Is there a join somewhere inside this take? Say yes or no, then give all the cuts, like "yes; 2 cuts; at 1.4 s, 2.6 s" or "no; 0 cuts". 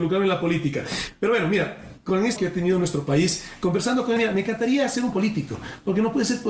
yes; 3 cuts; at 2.4 s, 4.2 s, 5.1 s